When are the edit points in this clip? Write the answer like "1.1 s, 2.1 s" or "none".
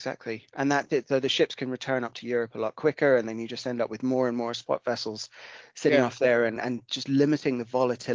6.6 s